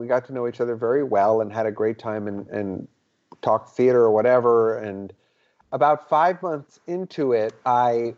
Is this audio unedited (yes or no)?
yes